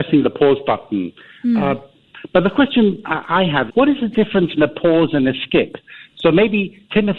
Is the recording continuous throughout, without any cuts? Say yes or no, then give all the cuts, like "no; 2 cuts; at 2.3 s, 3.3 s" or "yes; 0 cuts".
no; 2 cuts; at 3.7 s, 4.6 s